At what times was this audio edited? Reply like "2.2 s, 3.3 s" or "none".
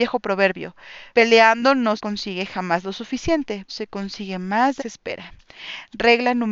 1.1 s, 2.0 s, 3.7 s, 4.8 s